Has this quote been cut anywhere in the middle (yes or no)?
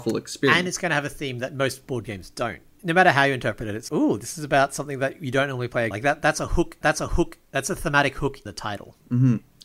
yes